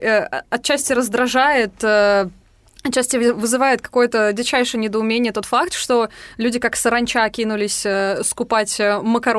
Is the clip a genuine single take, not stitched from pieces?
yes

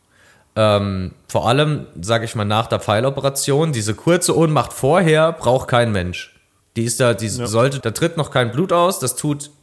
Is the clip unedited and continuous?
no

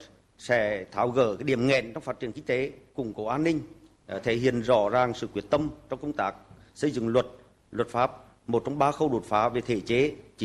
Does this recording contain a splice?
no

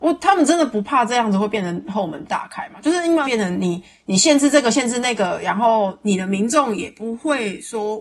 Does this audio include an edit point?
yes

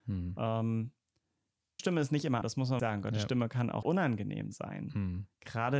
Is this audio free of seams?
no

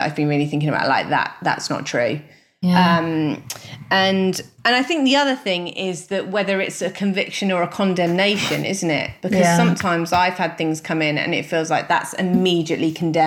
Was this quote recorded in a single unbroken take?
yes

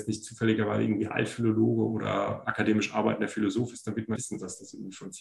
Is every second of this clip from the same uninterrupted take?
no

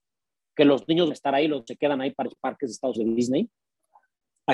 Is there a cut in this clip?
yes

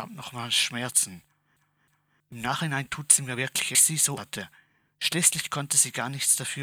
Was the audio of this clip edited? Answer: yes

